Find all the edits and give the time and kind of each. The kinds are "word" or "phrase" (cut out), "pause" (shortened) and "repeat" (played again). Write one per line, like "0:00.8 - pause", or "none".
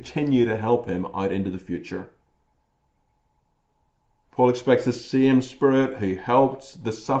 none